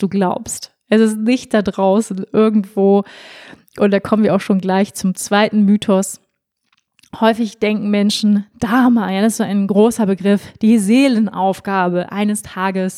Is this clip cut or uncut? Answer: uncut